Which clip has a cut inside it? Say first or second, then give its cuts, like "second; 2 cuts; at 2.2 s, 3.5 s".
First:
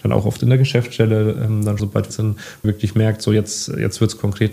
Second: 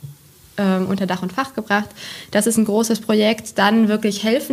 first; 3 cuts; at 1.8 s, 2.1 s, 2.6 s